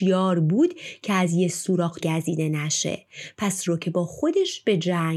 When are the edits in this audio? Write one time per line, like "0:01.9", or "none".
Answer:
0:02.0
0:03.7